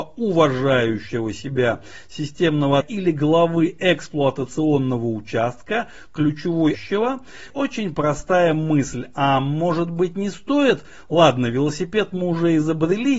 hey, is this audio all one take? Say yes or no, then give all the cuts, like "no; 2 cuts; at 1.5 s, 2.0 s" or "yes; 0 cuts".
no; 3 cuts; at 2.8 s, 6.7 s, 7.5 s